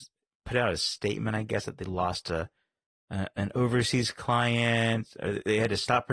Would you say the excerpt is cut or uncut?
uncut